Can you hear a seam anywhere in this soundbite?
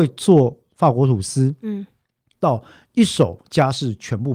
no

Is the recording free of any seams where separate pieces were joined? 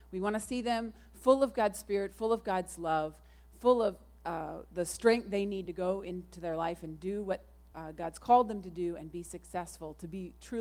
yes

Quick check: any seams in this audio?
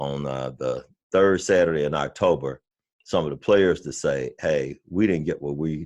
no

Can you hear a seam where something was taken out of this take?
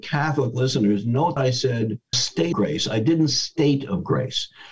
yes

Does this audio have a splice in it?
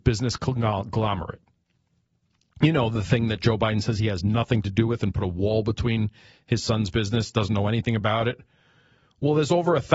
no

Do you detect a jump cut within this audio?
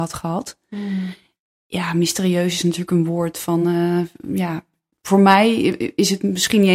no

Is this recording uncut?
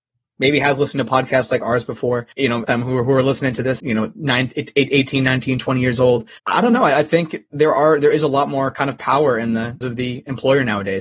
no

